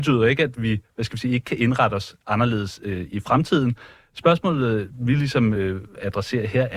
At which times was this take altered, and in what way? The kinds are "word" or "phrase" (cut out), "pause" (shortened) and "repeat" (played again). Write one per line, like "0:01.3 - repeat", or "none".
none